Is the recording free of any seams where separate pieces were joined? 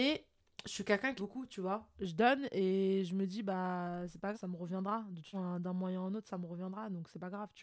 no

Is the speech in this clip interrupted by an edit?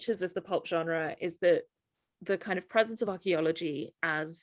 no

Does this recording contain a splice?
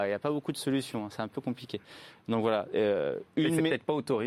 no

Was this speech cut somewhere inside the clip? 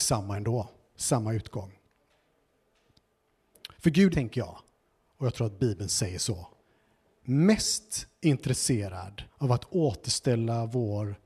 yes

